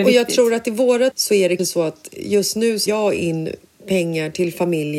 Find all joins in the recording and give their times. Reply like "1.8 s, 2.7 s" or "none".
1.1 s, 1.6 s, 2.9 s